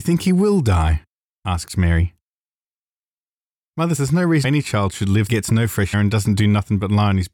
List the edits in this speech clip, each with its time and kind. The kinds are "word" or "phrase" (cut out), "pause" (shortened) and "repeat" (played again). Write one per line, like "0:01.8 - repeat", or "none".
0:04.0 - word
0:04.4 - word
0:05.3 - word
0:05.9 - word